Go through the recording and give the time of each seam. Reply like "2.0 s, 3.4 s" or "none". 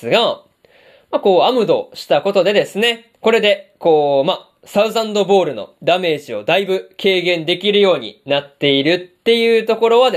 3.2 s